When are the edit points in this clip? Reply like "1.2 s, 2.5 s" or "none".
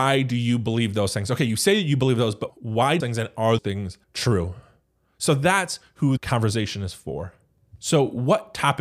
2.5 s, 3.0 s, 3.6 s, 4.0 s, 6.2 s